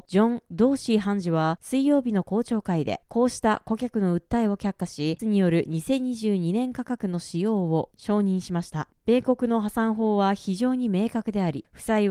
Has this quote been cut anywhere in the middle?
yes; 1 cut; at 5.2 s

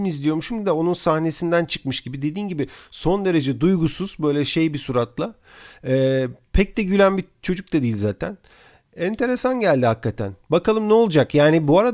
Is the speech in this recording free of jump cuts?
yes; 0 cuts

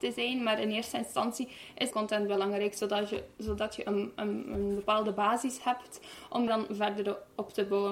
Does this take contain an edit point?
yes; 2 cuts; at 1.9 s, 6.5 s

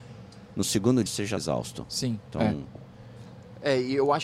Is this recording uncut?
no; 2 cuts; at 1.1 s, 1.4 s

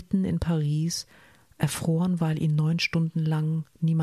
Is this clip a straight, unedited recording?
yes; 0 cuts

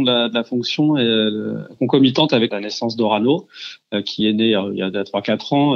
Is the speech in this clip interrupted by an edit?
no; 0 cuts

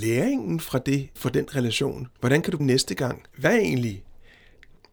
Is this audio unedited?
no; 4 cuts; at 1.2 s, 2.2 s, 2.6 s, 3.3 s

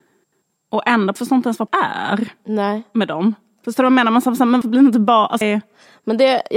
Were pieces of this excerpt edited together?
yes; 4 cuts; at 1.2 s, 1.7 s, 4.6 s, 5.4 s

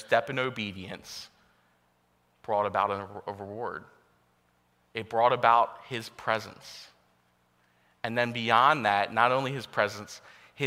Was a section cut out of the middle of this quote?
no; 0 cuts

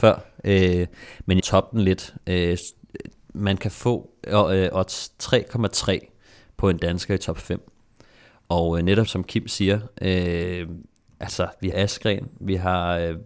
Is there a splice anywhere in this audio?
yes; 3 cuts; at 1.4 s, 9.1 s, 11.7 s

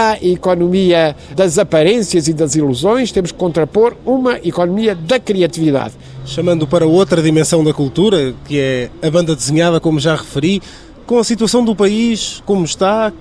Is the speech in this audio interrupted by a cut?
no; 0 cuts

